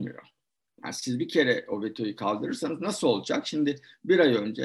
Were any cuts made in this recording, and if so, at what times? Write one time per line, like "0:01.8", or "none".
none